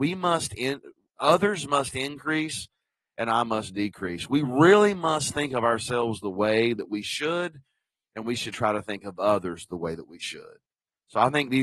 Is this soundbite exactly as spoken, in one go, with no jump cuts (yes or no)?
yes